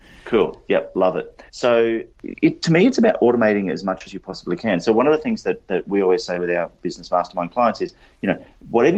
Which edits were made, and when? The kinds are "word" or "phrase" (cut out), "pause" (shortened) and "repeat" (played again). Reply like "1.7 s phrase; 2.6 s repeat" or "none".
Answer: 1.5 s pause